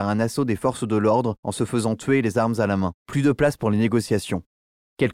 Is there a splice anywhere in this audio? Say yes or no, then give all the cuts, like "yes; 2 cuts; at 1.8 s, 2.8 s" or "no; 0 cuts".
yes; 1 cut; at 3.0 s